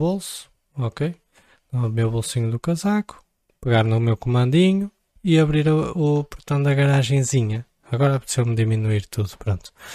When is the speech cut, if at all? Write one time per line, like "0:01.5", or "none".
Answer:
none